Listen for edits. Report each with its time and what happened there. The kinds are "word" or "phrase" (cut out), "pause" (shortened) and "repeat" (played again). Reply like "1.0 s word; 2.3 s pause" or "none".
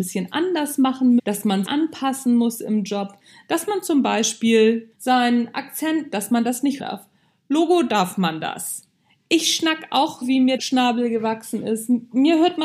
1.2 s word; 1.7 s word; 4.9 s word; 6.8 s word; 10.2 s word; 10.6 s word